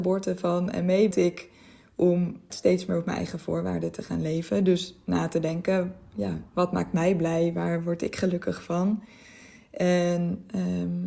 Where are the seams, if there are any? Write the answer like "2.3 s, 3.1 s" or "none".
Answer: 1.1 s, 2.5 s, 6.5 s